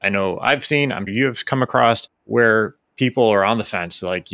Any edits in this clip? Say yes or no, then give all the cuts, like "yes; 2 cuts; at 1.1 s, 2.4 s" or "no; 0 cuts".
yes; 1 cut; at 1.1 s